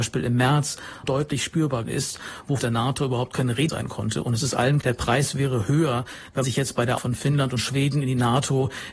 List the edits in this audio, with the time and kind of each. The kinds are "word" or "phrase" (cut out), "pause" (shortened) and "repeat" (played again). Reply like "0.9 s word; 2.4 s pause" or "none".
1.0 s word; 1.8 s word; 2.6 s word; 3.7 s word; 4.8 s word; 6.4 s word; 7.0 s word